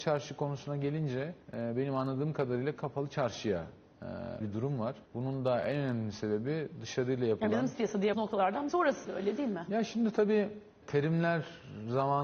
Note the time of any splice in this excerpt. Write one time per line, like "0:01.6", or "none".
0:01.4
0:04.4
0:05.1
0:07.7
0:08.1
0:08.7
0:09.0
0:10.8